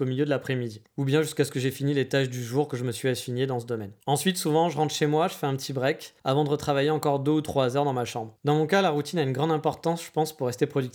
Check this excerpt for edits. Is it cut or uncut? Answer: cut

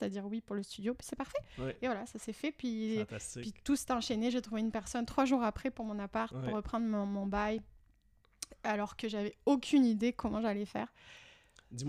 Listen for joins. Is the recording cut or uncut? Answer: uncut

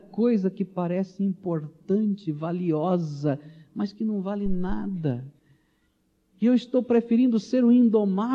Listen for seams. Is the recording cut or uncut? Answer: uncut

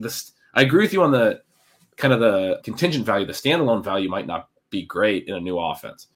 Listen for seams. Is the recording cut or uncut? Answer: cut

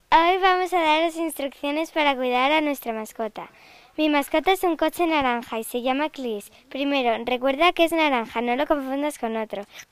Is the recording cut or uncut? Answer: uncut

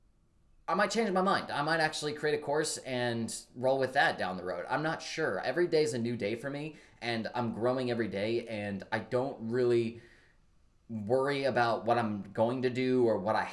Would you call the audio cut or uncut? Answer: uncut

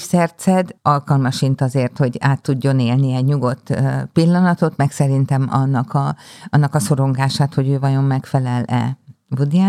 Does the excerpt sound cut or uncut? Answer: uncut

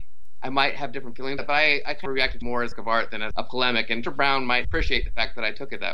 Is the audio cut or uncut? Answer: cut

